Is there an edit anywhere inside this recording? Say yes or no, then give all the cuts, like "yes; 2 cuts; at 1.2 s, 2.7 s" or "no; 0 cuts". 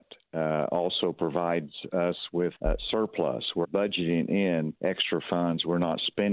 yes; 3 cuts; at 2.5 s, 3.6 s, 4.8 s